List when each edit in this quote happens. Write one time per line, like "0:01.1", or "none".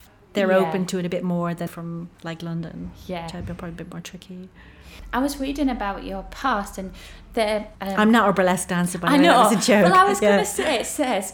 0:01.7
0:02.1